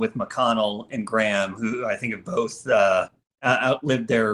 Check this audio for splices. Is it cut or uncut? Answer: uncut